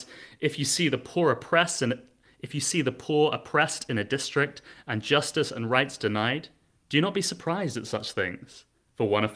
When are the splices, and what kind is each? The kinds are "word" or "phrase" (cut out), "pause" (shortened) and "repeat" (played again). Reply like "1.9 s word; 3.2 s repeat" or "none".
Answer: none

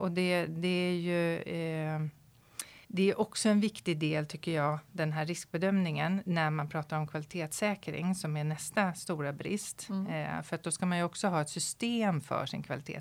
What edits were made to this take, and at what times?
2.8 s pause

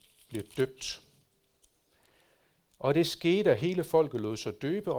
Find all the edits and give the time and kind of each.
none

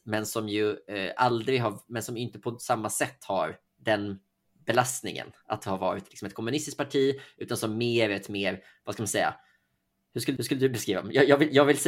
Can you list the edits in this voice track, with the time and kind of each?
3.7 s pause; 10.4 s repeat

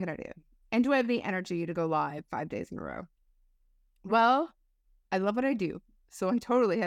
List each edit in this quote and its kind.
none

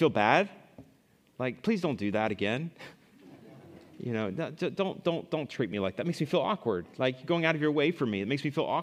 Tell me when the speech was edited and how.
none

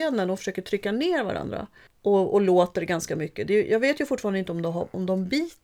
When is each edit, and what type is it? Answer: 1.9 s pause

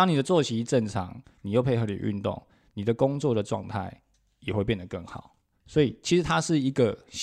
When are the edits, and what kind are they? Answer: none

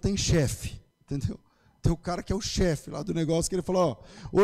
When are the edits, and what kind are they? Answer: 0.9 s pause

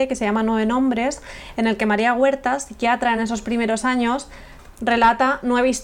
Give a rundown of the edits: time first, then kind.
none

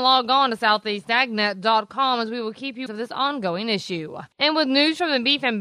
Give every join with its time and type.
2.9 s word

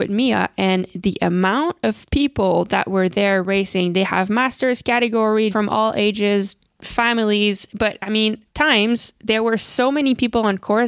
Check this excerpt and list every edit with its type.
5.5 s phrase; 8.5 s word

